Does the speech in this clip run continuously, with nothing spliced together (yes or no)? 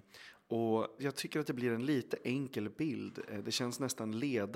no